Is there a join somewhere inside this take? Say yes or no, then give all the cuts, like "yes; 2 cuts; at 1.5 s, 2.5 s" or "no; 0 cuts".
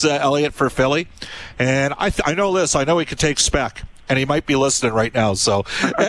no; 0 cuts